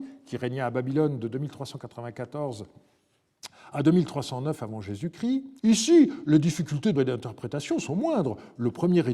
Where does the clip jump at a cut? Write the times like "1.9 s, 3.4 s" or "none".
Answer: 5.6 s, 6.9 s